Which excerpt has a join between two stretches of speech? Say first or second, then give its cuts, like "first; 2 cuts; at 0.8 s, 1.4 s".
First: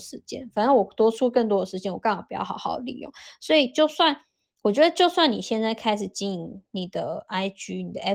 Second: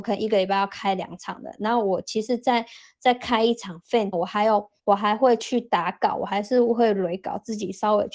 second; 2 cuts; at 4.1 s, 4.8 s